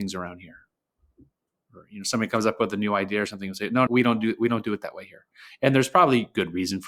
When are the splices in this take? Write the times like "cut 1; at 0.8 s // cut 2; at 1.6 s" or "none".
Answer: cut 1; at 3.9 s